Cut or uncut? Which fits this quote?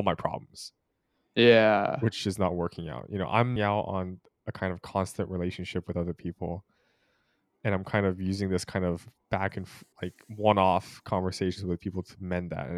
cut